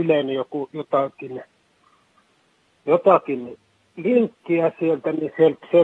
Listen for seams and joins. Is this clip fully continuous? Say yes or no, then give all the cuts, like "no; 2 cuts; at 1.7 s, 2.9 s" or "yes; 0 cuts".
yes; 0 cuts